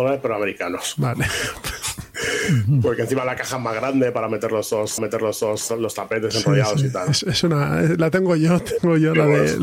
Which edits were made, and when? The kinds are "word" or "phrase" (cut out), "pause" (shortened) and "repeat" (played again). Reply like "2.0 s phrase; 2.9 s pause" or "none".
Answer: 5.0 s repeat